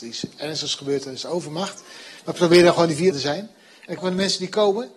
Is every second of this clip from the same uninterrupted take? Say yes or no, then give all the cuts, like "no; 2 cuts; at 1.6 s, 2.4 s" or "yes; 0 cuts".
no; 2 cuts; at 3.1 s, 4.0 s